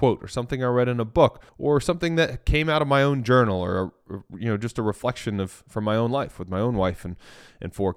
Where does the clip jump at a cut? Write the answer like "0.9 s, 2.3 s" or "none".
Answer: 1.5 s